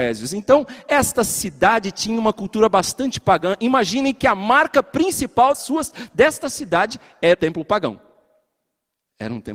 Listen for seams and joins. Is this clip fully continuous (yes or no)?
no